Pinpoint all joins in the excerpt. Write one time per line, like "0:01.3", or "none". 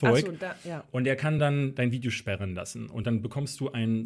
none